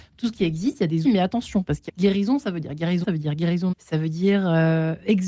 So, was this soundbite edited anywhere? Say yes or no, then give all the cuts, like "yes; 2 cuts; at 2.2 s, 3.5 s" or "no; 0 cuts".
yes; 4 cuts; at 1.0 s, 1.9 s, 3.0 s, 3.7 s